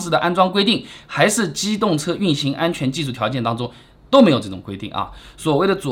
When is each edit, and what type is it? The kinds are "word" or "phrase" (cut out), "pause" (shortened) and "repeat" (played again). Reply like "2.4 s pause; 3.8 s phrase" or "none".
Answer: none